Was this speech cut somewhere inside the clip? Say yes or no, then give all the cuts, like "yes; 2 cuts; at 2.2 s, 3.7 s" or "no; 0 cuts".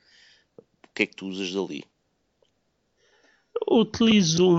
no; 0 cuts